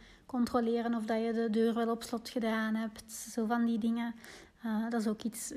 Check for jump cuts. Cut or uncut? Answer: uncut